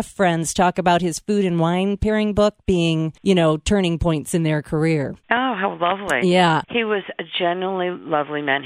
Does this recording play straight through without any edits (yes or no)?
no